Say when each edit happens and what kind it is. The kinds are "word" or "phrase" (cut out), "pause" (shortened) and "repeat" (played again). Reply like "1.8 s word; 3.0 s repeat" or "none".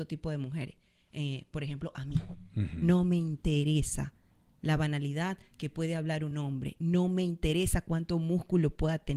none

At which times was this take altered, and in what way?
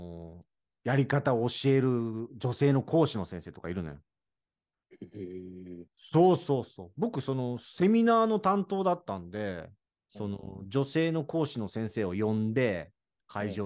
9.9 s pause

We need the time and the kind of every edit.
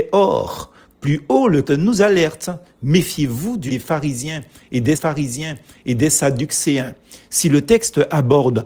1.6 s word; 3.7 s word; 4.9 s repeat

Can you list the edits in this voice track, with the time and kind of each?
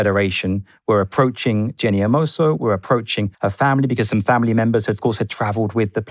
3.3 s pause

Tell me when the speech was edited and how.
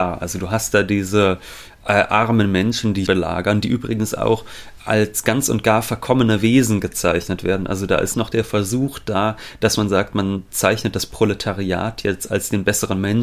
3.1 s word; 4.8 s word; 8.1 s word

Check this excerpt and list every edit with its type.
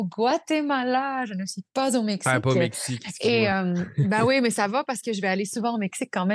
none

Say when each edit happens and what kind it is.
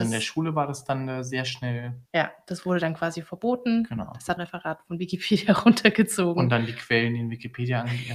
2.1 s pause; 4.4 s phrase

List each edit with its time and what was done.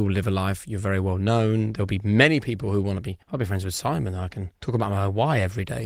3.2 s pause; 4.6 s pause

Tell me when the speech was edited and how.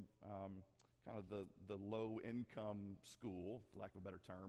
none

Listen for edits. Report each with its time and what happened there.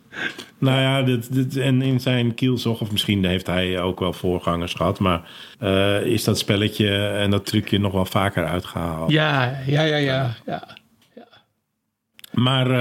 5.5 s pause; 11.0 s pause

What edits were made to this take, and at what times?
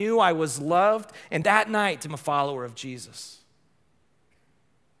1.4 s word; 2.1 s word

